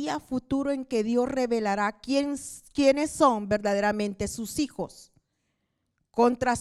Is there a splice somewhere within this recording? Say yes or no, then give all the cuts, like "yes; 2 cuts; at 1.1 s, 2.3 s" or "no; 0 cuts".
no; 0 cuts